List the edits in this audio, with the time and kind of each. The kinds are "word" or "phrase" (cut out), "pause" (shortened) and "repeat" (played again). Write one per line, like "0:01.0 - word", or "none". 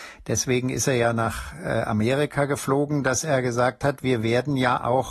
none